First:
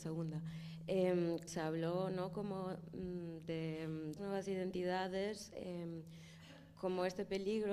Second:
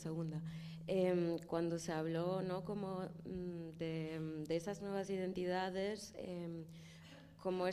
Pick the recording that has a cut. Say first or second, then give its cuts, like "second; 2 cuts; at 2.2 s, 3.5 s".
first; 2 cuts; at 1.5 s, 4.2 s